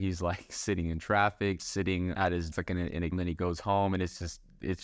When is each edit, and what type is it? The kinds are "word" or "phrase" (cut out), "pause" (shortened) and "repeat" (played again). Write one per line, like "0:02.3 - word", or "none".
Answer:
0:01.6 - word
0:02.5 - word
0:03.1 - word

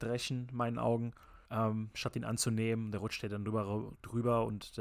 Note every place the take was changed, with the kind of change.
0:01.4 - pause

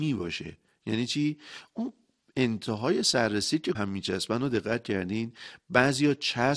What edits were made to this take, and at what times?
0:03.7 - phrase

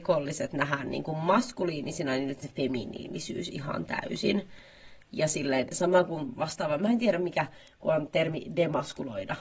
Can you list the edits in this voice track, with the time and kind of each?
0:02.4 - word

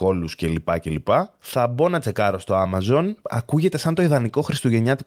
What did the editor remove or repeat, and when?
none

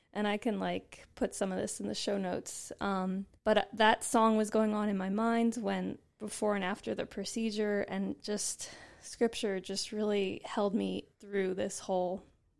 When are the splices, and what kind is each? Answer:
0:03.4 - pause
0:11.1 - pause

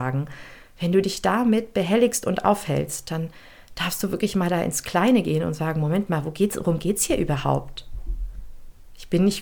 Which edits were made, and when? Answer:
none

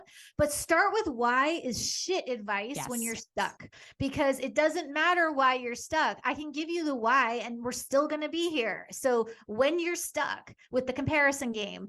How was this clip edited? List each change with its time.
none

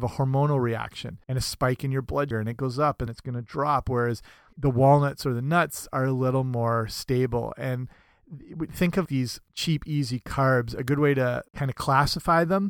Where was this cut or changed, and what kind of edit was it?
0:01.2 - pause
0:02.3 - word
0:03.1 - word
0:04.5 - word
0:09.1 - word
0:09.5 - pause
0:11.5 - pause

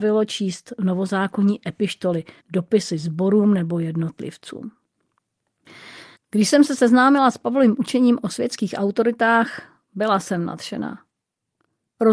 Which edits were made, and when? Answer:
0:02.4 - pause
0:06.2 - pause

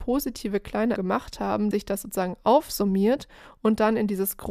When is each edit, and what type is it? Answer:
0:01.0 - word
0:01.7 - word

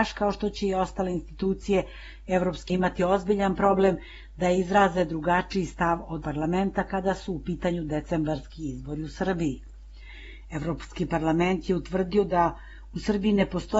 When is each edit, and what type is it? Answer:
0:02.7 - word
0:06.2 - word

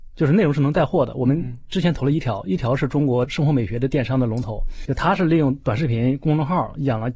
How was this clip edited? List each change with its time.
0:04.9 - word

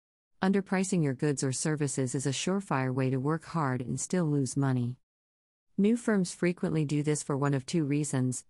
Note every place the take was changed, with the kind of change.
none

